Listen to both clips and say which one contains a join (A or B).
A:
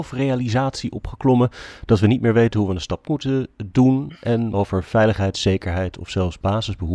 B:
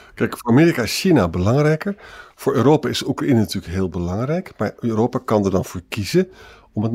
A